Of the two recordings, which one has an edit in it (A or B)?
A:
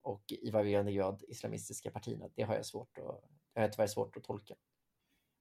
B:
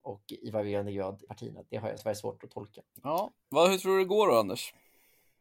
B